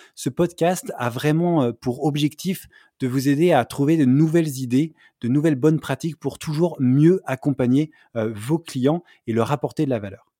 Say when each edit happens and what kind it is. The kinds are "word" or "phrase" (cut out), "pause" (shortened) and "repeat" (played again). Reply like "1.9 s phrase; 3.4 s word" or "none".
none